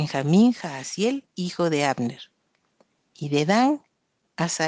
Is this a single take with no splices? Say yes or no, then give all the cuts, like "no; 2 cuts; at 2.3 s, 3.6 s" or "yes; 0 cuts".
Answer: yes; 0 cuts